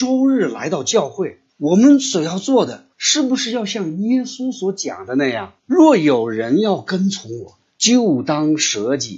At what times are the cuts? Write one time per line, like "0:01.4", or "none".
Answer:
0:01.5
0:02.9
0:05.6
0:07.7